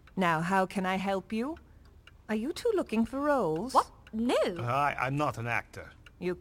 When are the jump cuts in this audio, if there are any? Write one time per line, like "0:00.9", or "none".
none